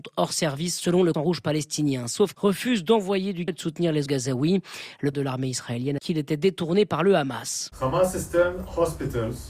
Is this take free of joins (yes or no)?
no